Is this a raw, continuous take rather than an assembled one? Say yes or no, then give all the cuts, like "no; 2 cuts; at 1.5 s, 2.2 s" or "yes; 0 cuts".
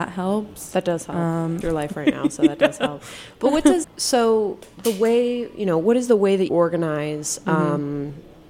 no; 3 cuts; at 1.6 s, 3.8 s, 6.5 s